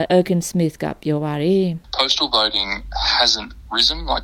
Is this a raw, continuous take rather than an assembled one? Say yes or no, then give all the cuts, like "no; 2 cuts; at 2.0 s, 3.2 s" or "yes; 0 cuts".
no; 1 cut; at 1.8 s